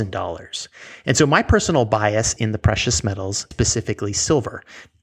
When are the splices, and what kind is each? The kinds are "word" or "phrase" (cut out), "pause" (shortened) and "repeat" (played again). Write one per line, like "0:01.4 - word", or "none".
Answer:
0:02.4 - word
0:03.5 - word